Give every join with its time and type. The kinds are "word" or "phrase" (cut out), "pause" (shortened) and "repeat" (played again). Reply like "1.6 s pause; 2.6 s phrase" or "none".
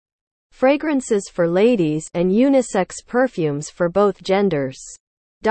none